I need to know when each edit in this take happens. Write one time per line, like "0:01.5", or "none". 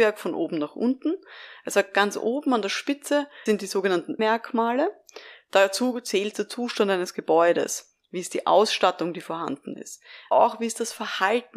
0:03.5
0:04.2
0:06.3
0:10.3